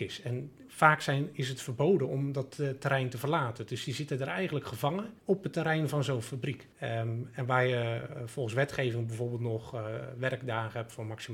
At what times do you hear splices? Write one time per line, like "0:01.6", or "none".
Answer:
0:05.2
0:06.7